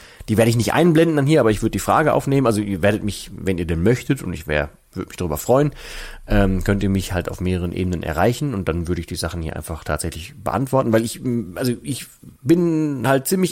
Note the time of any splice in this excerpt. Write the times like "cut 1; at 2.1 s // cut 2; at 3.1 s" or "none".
cut 1; at 12.4 s